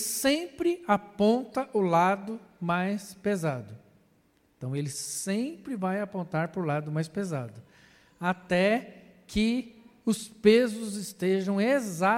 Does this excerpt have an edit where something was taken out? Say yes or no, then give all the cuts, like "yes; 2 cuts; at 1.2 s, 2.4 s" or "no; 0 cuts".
no; 0 cuts